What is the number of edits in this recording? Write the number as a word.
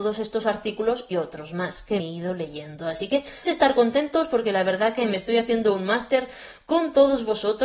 three